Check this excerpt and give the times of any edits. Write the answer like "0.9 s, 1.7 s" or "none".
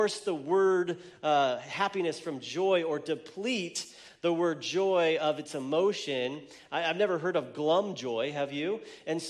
none

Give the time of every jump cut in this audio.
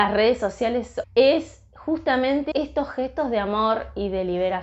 1.0 s, 2.5 s

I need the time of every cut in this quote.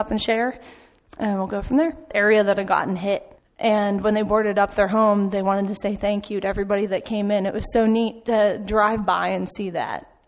3.4 s

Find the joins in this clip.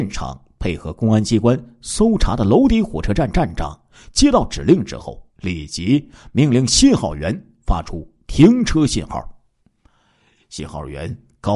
5.3 s

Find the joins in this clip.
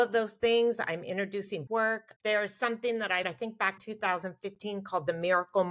1.7 s, 2.2 s, 3.2 s, 3.8 s

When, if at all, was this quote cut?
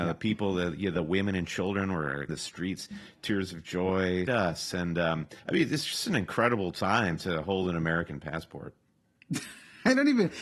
2.3 s, 4.3 s, 5.4 s

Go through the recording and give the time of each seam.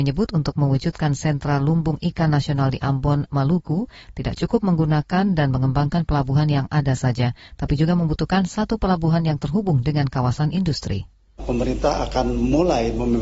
none

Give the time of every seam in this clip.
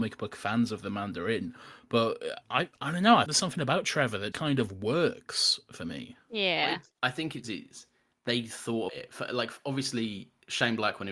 2.4 s, 3.3 s, 4.3 s, 7.4 s, 8.9 s

